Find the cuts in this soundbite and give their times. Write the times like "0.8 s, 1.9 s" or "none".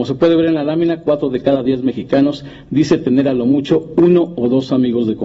none